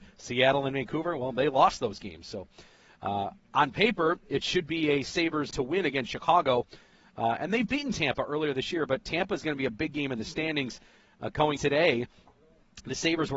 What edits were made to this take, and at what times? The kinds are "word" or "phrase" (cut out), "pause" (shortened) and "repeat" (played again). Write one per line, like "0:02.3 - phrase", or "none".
0:05.5 - word
0:11.6 - word